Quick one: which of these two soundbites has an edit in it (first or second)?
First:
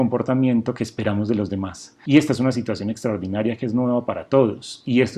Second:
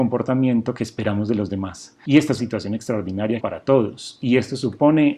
second